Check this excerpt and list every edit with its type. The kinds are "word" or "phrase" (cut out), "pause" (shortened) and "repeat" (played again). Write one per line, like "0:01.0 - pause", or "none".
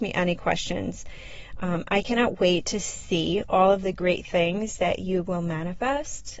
none